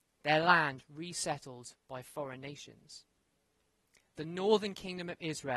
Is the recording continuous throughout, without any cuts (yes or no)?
yes